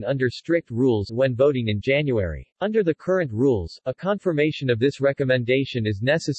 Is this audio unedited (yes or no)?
no